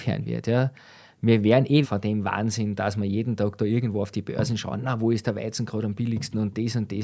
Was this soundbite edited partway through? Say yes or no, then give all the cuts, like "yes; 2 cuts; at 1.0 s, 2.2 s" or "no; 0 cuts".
yes; 1 cut; at 1.8 s